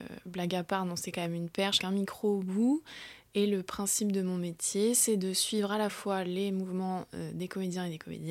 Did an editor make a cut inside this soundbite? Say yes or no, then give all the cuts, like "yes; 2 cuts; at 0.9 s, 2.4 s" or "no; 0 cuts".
yes; 1 cut; at 1.8 s